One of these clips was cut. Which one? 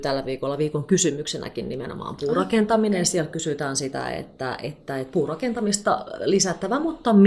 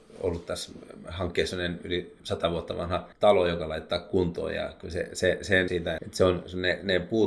second; 5 cuts; at 2.2 s, 3.1 s, 5.1 s, 5.7 s, 6.0 s

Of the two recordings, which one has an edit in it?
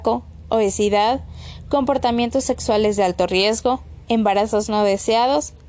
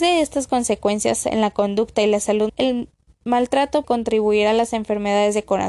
second; 2 cuts; at 2.5 s, 3.8 s

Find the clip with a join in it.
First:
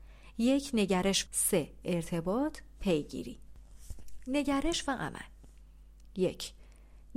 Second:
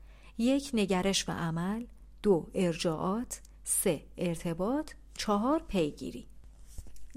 first; 2 cuts; at 1.2 s, 2.8 s

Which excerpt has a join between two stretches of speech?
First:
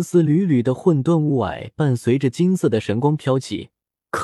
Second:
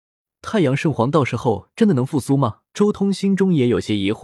second; 1 cut; at 2.7 s

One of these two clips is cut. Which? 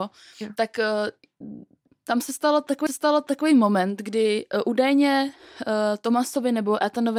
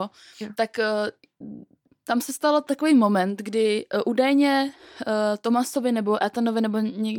first; 1 cut; at 2.9 s

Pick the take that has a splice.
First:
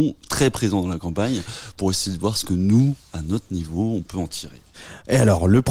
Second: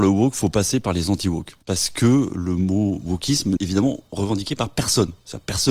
second; 2 cuts; at 1.6 s, 3.6 s

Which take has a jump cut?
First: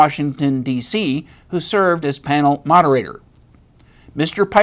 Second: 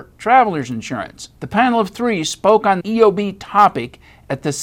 second; 2 cuts; at 1.4 s, 2.8 s

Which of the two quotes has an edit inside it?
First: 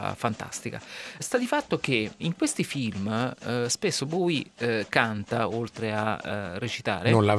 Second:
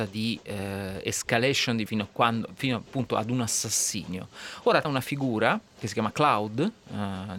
second; 2 cuts; at 1.9 s, 4.8 s

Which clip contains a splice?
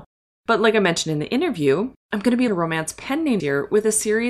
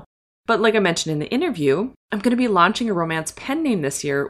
first; 2 cuts; at 2.5 s, 3.4 s

